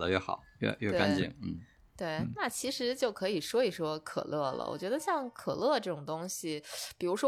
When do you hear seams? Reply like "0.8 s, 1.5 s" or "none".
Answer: none